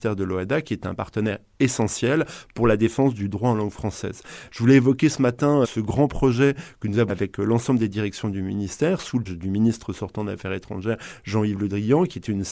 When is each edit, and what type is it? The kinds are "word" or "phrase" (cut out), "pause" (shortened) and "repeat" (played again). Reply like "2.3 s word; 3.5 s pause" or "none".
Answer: 5.6 s word; 7.1 s word; 9.3 s word